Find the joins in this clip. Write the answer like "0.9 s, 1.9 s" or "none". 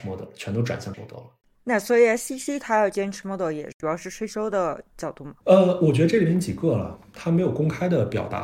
0.9 s, 3.2 s, 5.4 s